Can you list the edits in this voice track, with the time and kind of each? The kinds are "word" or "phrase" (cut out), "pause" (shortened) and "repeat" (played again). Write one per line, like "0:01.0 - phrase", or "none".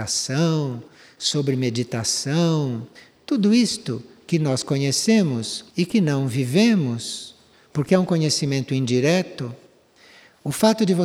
0:05.7 - pause